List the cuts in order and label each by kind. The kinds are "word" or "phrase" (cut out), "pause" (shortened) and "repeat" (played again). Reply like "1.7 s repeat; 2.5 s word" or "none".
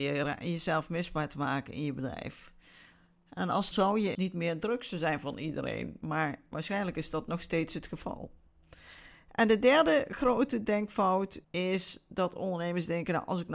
3.7 s phrase; 4.1 s word; 11.4 s pause